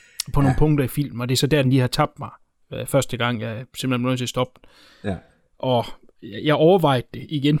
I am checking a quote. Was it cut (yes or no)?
no